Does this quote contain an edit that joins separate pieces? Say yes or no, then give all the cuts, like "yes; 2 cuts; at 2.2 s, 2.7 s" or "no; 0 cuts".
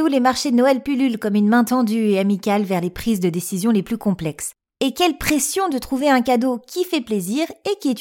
no; 0 cuts